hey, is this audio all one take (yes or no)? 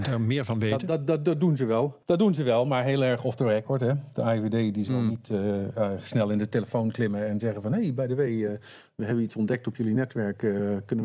no